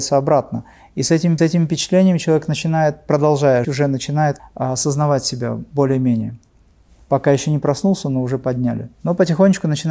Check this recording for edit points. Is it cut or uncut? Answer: cut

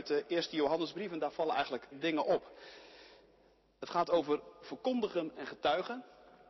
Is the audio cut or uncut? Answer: cut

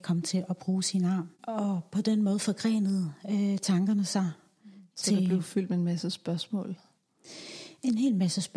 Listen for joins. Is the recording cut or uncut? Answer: cut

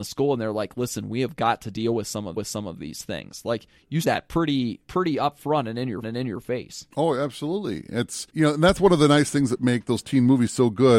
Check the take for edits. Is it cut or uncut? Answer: cut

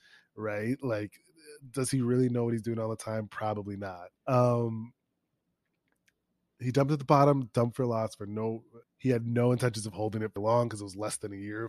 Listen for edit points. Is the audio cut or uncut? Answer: cut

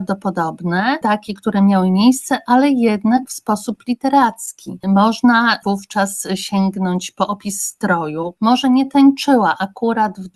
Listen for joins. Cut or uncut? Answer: uncut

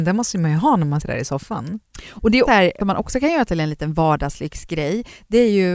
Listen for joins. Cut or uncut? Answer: cut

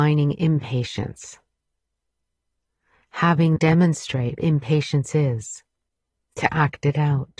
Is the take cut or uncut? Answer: cut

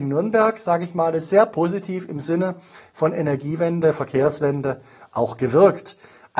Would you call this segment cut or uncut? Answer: uncut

